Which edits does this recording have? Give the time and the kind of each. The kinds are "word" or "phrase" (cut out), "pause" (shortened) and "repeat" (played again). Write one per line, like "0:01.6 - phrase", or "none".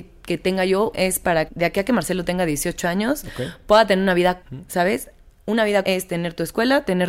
0:00.9 - word
0:01.5 - word
0:04.4 - word
0:05.8 - word